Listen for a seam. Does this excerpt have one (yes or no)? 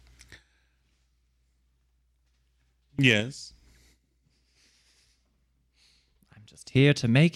no